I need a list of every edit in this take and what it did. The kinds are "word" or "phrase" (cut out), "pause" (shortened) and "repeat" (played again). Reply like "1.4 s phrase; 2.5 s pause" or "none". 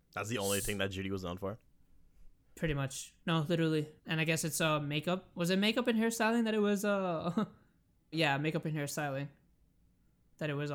3.2 s pause; 4.0 s pause; 8.1 s word